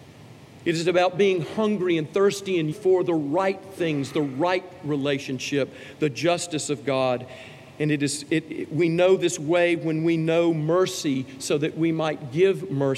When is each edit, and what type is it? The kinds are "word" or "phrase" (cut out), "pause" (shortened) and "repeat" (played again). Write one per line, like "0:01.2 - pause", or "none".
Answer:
0:02.7 - word